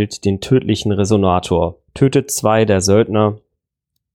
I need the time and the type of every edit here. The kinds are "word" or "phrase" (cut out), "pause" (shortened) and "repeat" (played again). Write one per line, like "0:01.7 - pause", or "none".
0:01.9 - pause